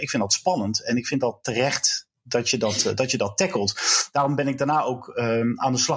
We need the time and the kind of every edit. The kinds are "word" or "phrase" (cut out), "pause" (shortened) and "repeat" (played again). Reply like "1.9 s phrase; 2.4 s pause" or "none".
none